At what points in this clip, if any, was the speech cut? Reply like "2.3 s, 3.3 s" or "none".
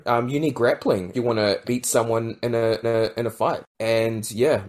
1.1 s, 1.6 s, 2.8 s